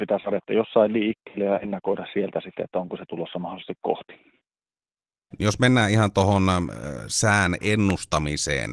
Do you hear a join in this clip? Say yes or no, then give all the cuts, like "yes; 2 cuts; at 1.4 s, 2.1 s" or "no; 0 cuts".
no; 0 cuts